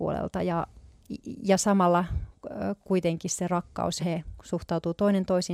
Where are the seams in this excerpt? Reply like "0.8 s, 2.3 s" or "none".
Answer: 4.0 s